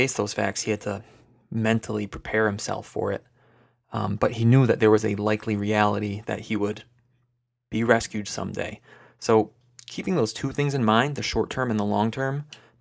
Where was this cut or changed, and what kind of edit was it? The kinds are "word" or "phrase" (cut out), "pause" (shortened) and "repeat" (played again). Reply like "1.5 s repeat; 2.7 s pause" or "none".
none